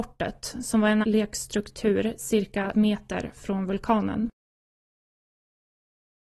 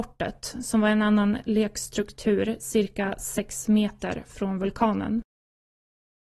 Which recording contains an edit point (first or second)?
first